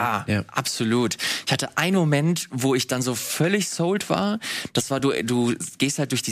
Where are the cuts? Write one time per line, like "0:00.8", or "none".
none